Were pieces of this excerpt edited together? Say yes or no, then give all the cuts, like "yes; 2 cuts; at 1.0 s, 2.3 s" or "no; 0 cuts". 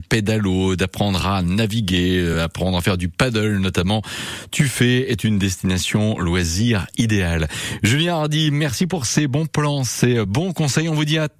no; 0 cuts